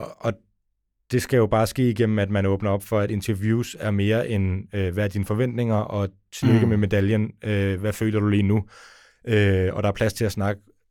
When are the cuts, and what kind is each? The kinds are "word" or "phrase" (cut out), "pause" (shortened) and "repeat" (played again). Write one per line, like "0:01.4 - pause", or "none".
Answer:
none